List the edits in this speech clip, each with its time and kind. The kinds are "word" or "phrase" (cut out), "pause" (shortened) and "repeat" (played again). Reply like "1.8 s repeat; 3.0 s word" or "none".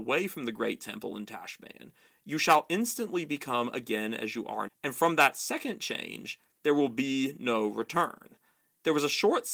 4.7 s word